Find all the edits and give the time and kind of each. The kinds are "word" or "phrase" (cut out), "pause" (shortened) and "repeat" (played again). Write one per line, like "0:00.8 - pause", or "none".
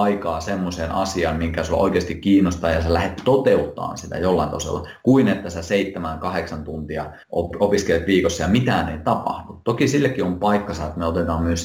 0:07.2 - pause